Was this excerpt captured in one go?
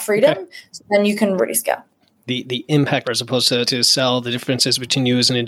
no; 3 cuts; at 1.4 s, 3.0 s, 3.7 s

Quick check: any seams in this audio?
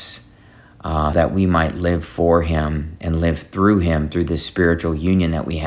yes; 1 cut; at 1.1 s

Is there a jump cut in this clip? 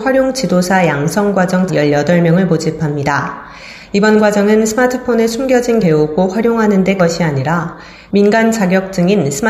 yes; 3 cuts; at 1.7 s, 5.8 s, 7.0 s

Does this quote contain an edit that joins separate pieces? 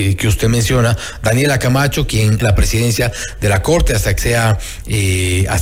yes; 2 cuts; at 2.4 s, 4.2 s

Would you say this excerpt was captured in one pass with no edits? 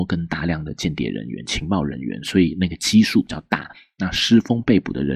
yes; 0 cuts

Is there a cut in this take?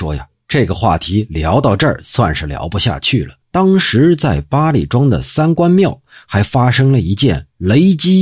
yes; 1 cut; at 3.4 s

